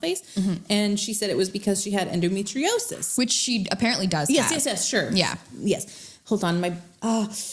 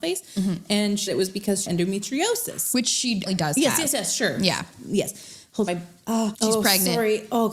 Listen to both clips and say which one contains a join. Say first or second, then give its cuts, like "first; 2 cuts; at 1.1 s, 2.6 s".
second; 5 cuts; at 1.1 s, 1.7 s, 3.3 s, 5.7 s, 6.3 s